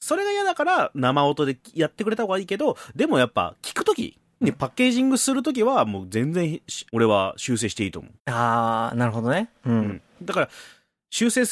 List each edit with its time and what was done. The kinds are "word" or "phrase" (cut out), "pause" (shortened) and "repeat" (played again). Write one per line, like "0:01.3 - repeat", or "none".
0:04.4 - word
0:06.9 - pause
0:08.2 - pause